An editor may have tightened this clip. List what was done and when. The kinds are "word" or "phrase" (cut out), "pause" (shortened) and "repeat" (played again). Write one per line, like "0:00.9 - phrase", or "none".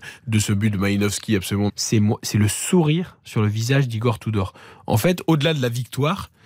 0:01.7 - word